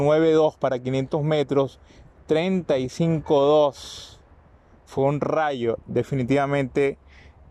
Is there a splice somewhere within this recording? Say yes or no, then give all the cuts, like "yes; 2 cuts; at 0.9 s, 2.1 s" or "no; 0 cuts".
no; 0 cuts